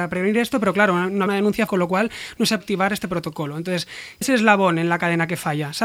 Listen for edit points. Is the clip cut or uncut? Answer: cut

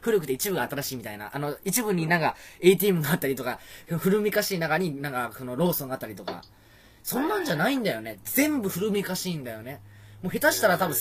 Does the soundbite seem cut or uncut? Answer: uncut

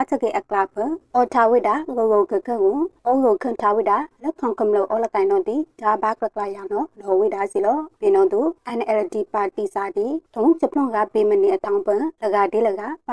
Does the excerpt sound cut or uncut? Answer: uncut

